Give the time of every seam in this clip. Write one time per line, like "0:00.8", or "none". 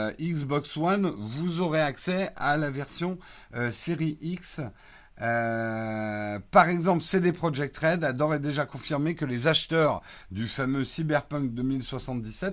none